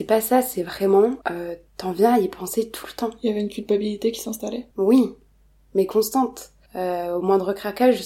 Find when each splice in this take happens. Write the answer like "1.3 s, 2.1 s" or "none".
1.2 s, 4.7 s, 6.7 s